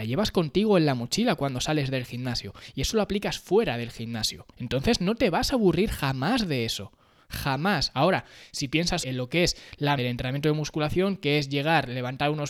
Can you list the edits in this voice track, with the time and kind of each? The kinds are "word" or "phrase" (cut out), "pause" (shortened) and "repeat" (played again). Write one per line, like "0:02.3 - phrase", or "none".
0:04.5 - pause
0:09.0 - word
0:10.0 - word